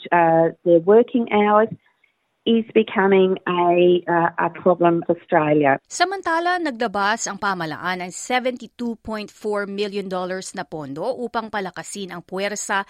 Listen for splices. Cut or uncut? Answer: cut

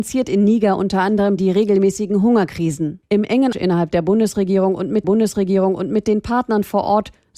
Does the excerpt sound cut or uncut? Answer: cut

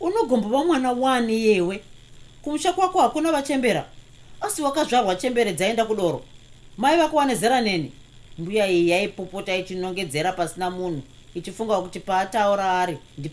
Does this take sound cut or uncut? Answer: uncut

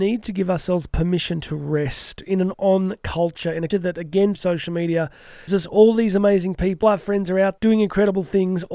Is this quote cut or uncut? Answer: cut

